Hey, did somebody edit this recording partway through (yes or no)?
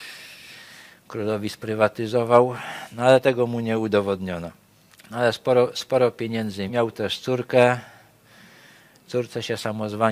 yes